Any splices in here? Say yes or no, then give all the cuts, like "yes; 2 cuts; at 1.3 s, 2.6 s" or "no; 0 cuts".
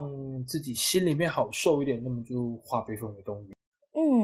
no; 0 cuts